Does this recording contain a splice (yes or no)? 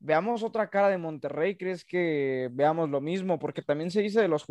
no